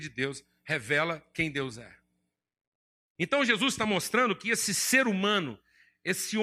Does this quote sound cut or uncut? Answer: uncut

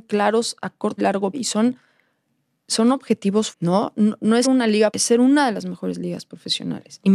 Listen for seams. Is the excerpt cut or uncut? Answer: cut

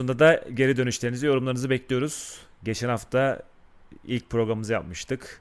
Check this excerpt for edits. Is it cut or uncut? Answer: uncut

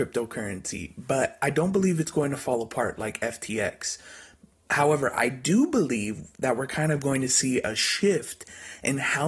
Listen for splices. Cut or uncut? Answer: uncut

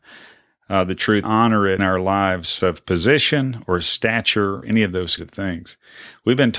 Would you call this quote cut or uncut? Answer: cut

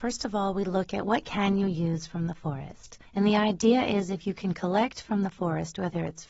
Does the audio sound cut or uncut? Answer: cut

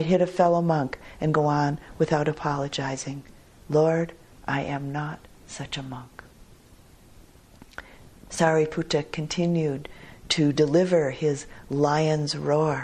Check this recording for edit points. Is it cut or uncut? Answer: uncut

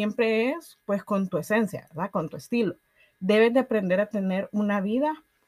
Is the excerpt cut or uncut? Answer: uncut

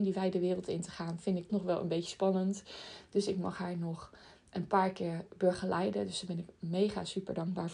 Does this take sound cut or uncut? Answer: cut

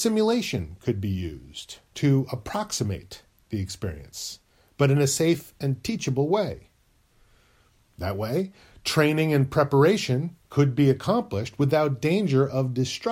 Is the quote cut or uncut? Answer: uncut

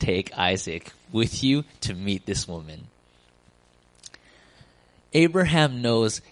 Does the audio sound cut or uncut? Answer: uncut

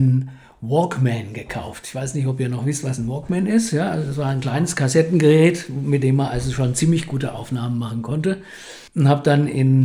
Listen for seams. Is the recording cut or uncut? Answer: cut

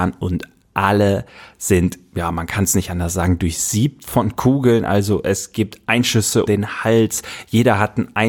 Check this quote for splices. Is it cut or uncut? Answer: cut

